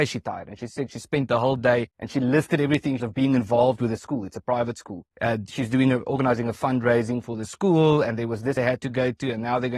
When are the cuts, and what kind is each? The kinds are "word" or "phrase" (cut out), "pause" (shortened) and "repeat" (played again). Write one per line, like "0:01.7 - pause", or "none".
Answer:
0:01.9 - pause
0:03.0 - phrase
0:05.1 - pause
0:08.6 - phrase